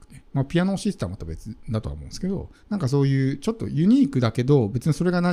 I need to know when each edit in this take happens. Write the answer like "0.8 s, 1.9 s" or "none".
2.6 s

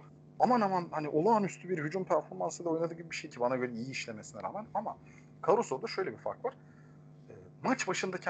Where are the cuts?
3.3 s

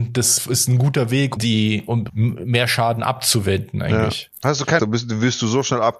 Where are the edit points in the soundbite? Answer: 1.4 s, 2.1 s, 4.8 s

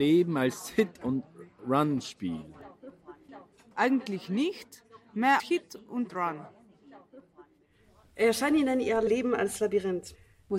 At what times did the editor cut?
5.4 s, 6.1 s

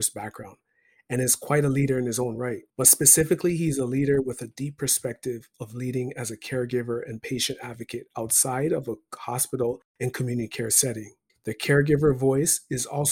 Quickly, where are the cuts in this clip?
2.7 s, 9.9 s, 11.3 s

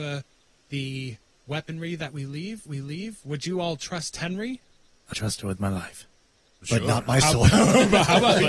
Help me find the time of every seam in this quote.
2.7 s, 5.1 s

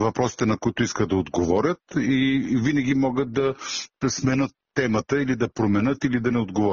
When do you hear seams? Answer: none

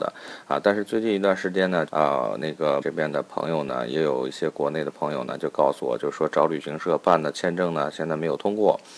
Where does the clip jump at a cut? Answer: 1.9 s, 2.8 s

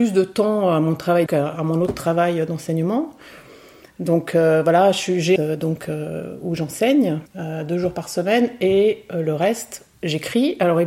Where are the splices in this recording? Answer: 1.3 s, 5.4 s, 7.3 s

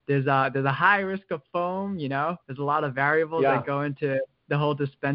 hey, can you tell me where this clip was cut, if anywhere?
2.4 s

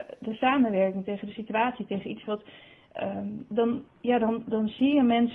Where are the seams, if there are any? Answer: 2.2 s, 3.9 s

